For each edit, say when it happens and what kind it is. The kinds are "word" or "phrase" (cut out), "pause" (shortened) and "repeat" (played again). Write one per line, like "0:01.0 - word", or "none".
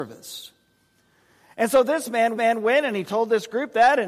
0:02.4 - repeat